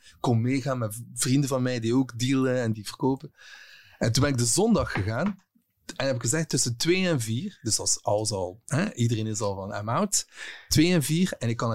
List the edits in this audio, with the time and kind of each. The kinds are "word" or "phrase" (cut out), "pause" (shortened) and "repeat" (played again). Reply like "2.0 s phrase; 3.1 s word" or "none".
2.7 s word